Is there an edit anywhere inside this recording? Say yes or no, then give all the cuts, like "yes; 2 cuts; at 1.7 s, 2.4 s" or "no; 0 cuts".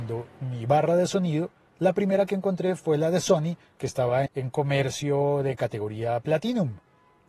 yes; 1 cut; at 4.3 s